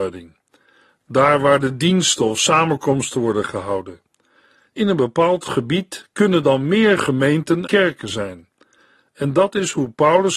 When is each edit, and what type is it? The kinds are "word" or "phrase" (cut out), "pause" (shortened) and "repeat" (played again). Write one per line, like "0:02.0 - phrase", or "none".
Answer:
0:07.7 - word